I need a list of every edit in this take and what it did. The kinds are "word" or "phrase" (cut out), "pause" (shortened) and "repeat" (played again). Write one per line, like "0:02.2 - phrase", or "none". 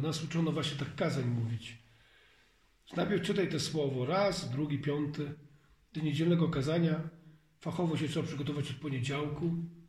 none